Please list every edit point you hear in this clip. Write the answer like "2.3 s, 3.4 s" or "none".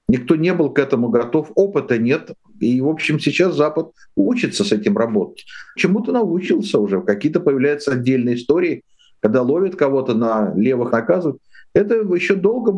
5.8 s, 10.9 s